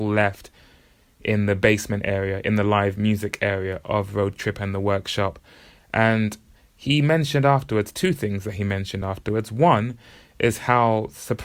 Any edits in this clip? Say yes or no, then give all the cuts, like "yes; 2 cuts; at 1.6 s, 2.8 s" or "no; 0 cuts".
no; 0 cuts